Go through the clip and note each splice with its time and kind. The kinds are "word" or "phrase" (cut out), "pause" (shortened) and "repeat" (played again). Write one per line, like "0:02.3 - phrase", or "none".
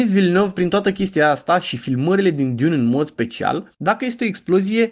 0:03.7 - pause